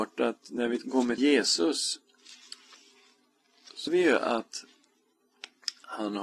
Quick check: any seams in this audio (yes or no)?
yes